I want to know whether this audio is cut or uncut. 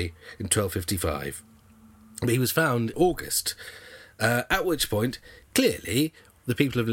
cut